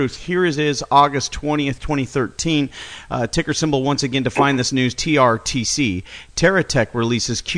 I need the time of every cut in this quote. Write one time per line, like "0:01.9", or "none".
none